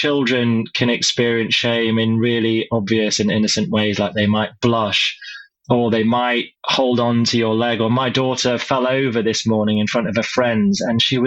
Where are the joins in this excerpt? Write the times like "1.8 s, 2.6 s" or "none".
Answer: 6.6 s